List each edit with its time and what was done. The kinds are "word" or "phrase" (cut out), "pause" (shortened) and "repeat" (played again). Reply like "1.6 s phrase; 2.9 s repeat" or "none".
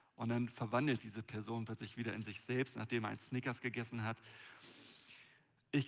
1.0 s word